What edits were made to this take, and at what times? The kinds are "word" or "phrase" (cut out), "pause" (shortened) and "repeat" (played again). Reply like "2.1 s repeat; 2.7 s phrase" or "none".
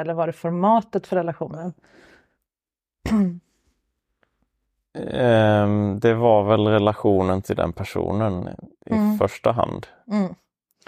none